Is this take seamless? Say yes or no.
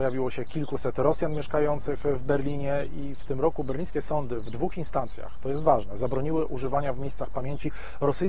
yes